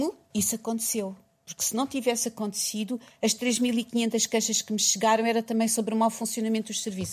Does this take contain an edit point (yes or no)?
no